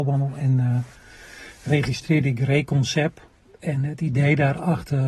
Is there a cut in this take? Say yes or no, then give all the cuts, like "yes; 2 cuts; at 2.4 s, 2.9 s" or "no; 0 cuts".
no; 0 cuts